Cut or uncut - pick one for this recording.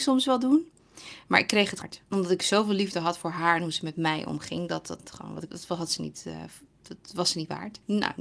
cut